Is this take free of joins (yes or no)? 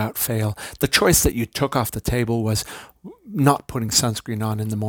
yes